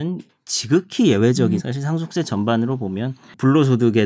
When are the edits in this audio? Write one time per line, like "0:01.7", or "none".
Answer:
0:01.6